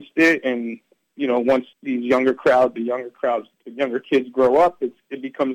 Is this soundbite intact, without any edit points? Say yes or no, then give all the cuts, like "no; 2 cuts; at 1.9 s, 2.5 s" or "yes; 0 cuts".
no; 2 cuts; at 1.7 s, 3.5 s